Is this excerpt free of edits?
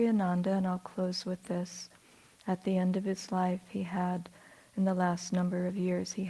yes; 0 cuts

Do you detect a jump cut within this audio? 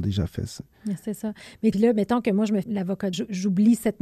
yes; 3 cuts; at 1.7 s, 2.6 s, 3.1 s

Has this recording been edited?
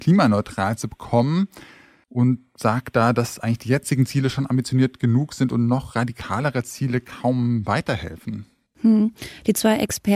no; 0 cuts

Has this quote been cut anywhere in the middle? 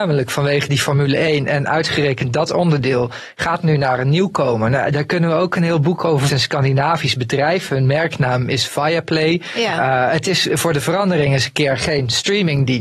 yes; 1 cut; at 6.3 s

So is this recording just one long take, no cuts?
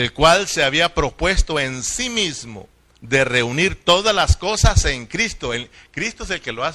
yes; 0 cuts

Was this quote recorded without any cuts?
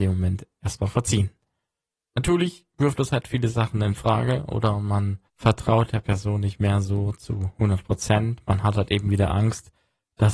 no; 1 cut; at 5.3 s

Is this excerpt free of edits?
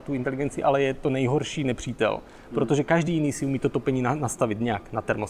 yes; 0 cuts

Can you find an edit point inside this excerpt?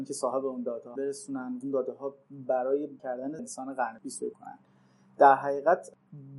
yes; 5 cuts; at 1.0 s, 1.6 s, 3.0 s, 3.4 s, 4.3 s

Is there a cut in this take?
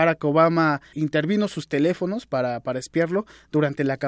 yes; 1 cut; at 0.9 s

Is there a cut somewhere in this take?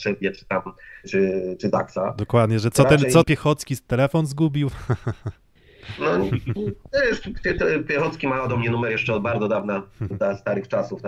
yes; 3 cuts; at 1.0 s, 3.2 s, 10.1 s

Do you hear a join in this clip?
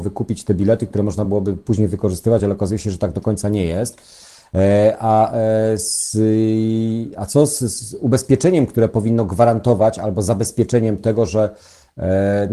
no; 0 cuts

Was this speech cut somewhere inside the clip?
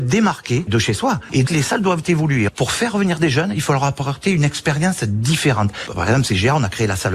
yes; 1 cut; at 1.5 s

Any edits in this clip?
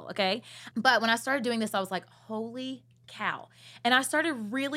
no; 0 cuts

